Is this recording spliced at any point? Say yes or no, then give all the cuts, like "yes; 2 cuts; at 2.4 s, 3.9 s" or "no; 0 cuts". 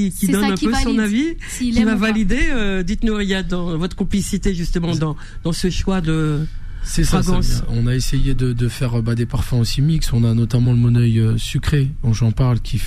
no; 0 cuts